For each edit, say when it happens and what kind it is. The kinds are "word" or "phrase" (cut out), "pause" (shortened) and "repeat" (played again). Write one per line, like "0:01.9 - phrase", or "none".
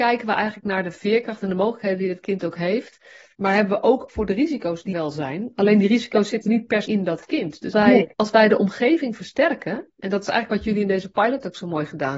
0:03.3 - pause
0:04.1 - word
0:04.9 - word
0:06.8 - word
0:07.7 - word
0:08.1 - pause
0:09.9 - pause